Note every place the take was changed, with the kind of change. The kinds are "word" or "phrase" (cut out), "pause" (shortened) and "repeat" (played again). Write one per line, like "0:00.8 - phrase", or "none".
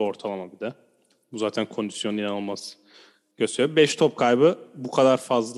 none